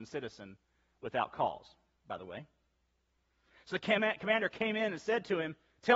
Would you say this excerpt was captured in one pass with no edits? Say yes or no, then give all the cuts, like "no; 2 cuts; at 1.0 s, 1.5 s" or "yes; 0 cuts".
yes; 0 cuts